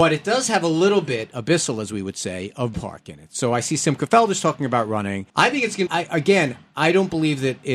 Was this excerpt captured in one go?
no; 3 cuts; at 2.7 s, 5.3 s, 5.9 s

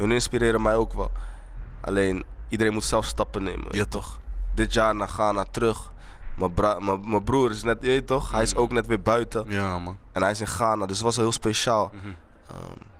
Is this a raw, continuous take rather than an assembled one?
yes; 0 cuts

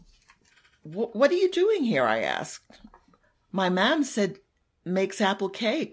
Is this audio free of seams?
yes; 0 cuts

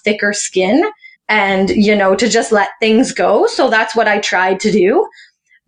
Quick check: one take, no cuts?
no; 1 cut; at 1.2 s

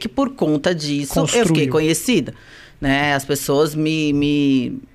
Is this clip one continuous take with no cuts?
yes; 0 cuts

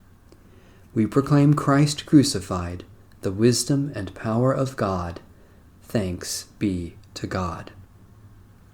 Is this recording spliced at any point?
no; 0 cuts

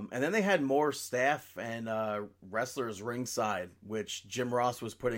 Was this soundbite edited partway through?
no; 0 cuts

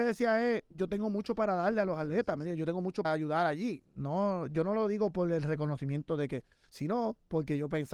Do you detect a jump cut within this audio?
yes; 1 cut; at 3.0 s

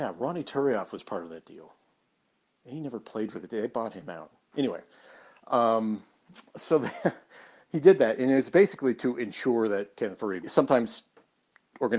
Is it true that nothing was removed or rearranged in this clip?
no; 1 cut; at 10.4 s

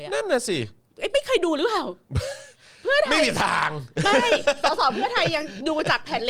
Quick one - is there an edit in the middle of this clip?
no; 0 cuts

